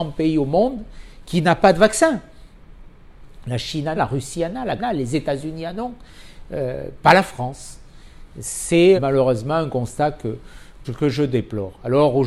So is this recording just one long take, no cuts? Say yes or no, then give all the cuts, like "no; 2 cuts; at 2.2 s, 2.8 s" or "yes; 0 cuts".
no; 4 cuts; at 4.0 s, 4.8 s, 9.0 s, 10.8 s